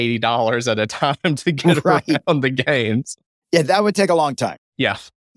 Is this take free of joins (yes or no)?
yes